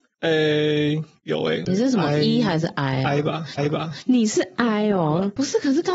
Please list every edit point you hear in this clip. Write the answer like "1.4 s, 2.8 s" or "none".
3.6 s